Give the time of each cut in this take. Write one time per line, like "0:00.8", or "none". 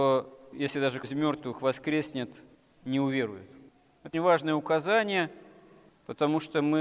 0:01.0
0:04.1